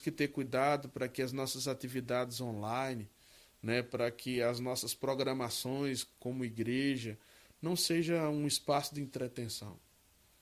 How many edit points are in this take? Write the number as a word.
zero